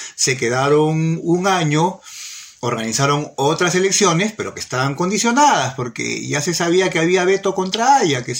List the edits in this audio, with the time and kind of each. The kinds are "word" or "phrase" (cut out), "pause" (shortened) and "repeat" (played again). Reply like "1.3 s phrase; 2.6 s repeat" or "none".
2.6 s pause